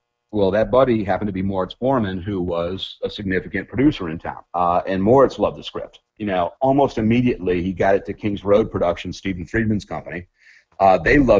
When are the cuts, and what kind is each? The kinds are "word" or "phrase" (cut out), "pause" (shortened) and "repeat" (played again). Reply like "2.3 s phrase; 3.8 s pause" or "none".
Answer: 4.5 s pause

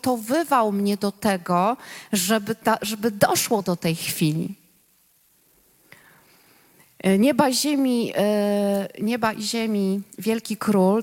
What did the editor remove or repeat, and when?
10.1 s pause

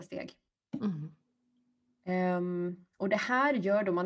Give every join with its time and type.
2.9 s pause

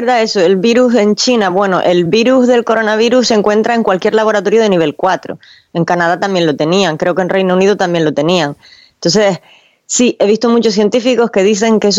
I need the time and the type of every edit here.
none

